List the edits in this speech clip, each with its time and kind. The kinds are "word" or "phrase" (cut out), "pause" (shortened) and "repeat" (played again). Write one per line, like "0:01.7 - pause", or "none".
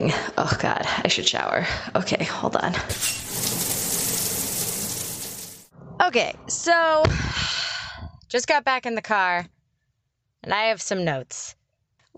none